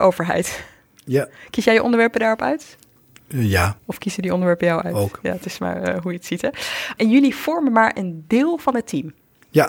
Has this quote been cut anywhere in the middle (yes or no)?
yes